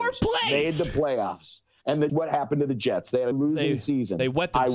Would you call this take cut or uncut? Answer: cut